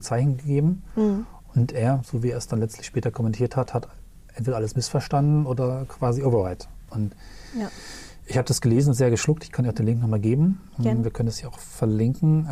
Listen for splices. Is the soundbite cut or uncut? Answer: uncut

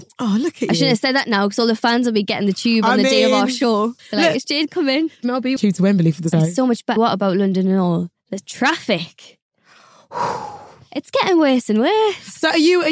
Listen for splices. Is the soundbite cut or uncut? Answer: cut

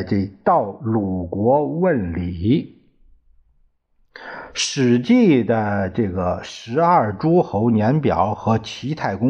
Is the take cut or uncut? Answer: uncut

